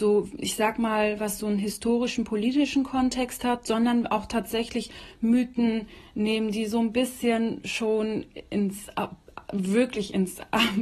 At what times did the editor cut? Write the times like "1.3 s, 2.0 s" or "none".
none